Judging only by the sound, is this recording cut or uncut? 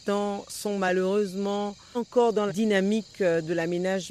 cut